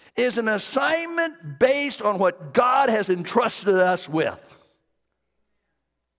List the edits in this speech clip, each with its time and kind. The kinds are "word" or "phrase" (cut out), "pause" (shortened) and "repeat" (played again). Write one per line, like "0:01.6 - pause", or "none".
none